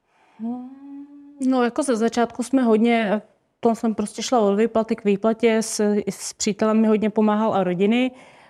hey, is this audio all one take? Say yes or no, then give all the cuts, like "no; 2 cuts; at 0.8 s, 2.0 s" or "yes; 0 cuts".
yes; 0 cuts